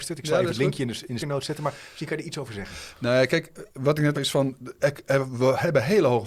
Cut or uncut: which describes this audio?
cut